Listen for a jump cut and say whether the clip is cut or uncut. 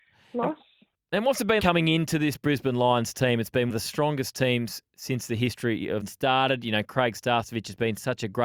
cut